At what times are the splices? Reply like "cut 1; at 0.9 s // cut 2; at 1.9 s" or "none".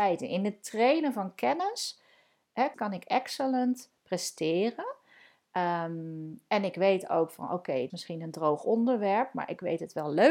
cut 1; at 2.7 s // cut 2; at 7.9 s